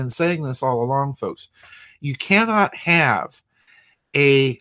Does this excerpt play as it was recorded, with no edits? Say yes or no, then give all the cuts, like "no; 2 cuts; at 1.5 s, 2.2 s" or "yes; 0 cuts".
yes; 0 cuts